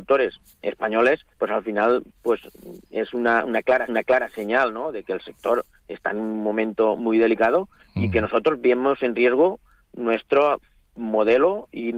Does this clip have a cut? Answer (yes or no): yes